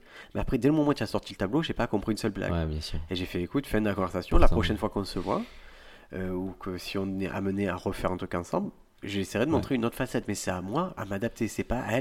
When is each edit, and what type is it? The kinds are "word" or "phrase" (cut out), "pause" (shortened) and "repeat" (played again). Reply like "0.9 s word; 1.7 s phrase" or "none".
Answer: none